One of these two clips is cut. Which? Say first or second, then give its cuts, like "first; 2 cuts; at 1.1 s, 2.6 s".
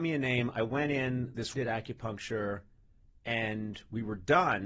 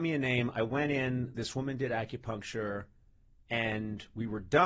first; 1 cut; at 1.5 s